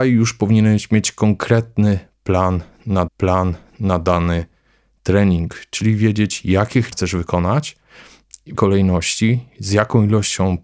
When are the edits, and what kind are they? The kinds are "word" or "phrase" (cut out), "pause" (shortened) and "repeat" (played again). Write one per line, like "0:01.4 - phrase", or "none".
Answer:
0:03.1 - repeat
0:06.9 - word
0:08.5 - word

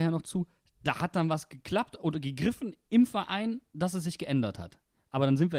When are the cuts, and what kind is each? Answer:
0:03.7 - pause

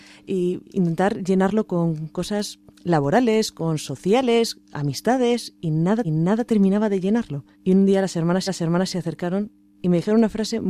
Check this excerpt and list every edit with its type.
0:06.0 - repeat
0:07.5 - pause
0:08.5 - repeat

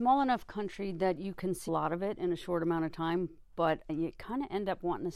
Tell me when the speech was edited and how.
0:01.7 - word
0:03.9 - word

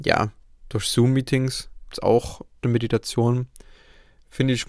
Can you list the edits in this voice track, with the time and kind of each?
0:01.9 - word
0:02.6 - word

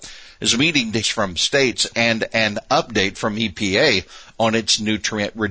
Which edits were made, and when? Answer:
0:01.0 - phrase

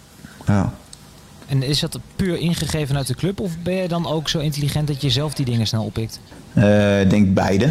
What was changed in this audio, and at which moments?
none

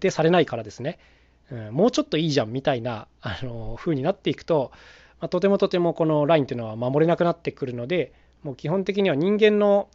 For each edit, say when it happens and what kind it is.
none

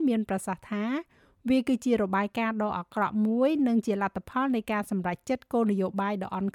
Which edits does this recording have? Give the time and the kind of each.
none

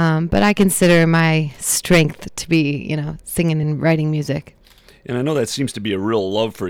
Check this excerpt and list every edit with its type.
none

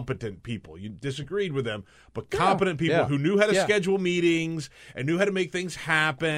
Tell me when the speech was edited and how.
none

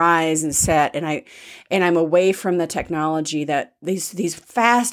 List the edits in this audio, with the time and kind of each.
none

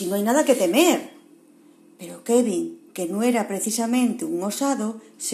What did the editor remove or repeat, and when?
none

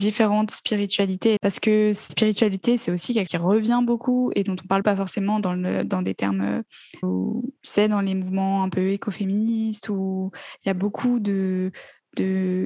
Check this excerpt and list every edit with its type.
0:01.4 - word
0:02.1 - word
0:03.3 - word
0:04.8 - word
0:07.0 - word

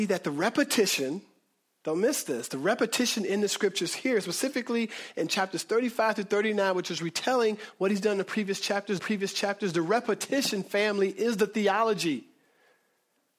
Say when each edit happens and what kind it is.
0:09.0 - repeat

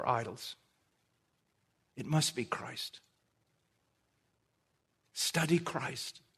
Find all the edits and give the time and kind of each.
none

